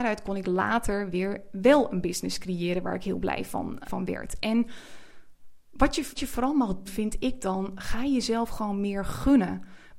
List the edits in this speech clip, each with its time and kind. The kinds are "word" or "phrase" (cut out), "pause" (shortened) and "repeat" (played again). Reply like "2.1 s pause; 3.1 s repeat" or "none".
3.8 s word; 6.2 s word; 6.9 s word